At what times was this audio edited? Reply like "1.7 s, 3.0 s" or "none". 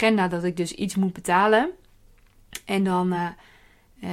none